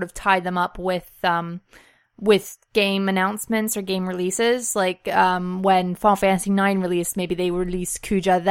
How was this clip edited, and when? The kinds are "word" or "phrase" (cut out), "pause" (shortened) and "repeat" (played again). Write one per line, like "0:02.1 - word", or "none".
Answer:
none